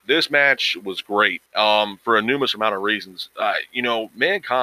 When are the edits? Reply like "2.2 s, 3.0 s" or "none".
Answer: 1.5 s